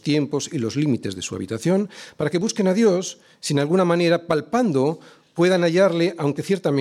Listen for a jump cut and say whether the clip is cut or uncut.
uncut